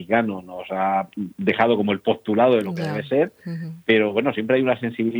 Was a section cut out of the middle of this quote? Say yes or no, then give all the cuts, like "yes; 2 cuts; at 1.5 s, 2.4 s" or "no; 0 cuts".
no; 0 cuts